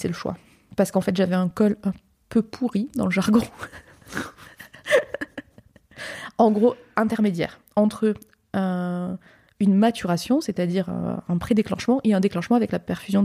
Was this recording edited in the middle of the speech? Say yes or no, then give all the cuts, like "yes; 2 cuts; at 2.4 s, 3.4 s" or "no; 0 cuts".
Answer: no; 0 cuts